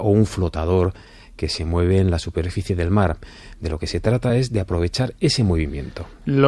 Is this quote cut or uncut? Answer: uncut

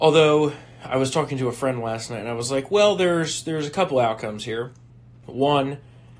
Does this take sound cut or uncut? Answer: uncut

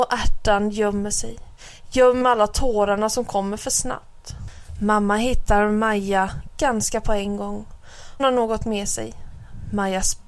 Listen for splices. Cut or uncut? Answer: cut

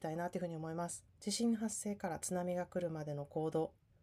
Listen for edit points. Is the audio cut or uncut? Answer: cut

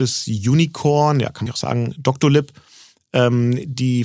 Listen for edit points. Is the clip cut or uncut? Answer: cut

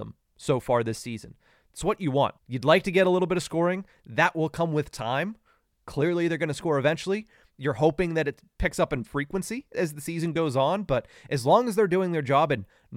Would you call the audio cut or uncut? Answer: cut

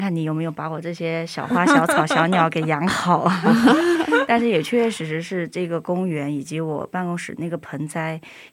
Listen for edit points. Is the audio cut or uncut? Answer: cut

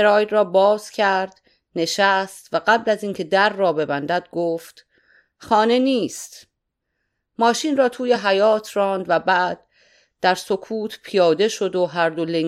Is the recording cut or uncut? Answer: uncut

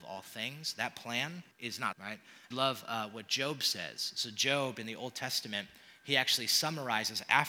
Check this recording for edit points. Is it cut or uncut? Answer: cut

